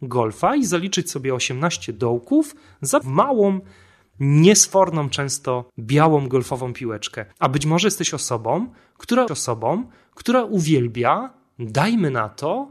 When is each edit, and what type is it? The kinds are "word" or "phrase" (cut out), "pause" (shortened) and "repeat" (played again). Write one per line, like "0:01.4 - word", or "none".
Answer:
0:03.0 - phrase
0:05.7 - pause
0:07.3 - pause
0:09.3 - repeat

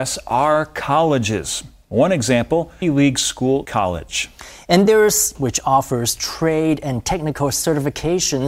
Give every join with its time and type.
0:02.8 - phrase
0:03.6 - word
0:04.9 - word
0:05.3 - phrase

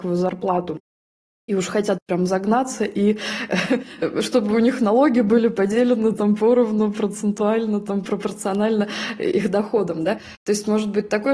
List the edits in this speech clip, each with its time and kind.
none

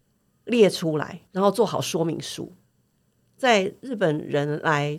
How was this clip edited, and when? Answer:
0:01.3 - pause

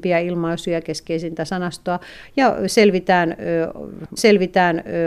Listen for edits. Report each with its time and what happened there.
0:04.2 - repeat

